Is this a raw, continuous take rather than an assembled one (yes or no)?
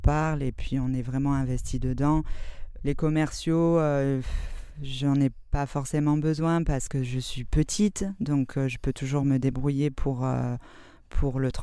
yes